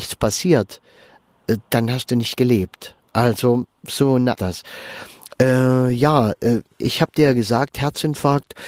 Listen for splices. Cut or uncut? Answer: cut